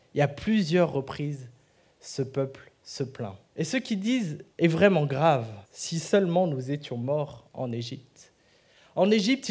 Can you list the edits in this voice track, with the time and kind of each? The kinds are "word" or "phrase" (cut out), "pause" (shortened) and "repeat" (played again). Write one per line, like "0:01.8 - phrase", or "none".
0:03.5 - pause
0:04.5 - pause
0:05.6 - pause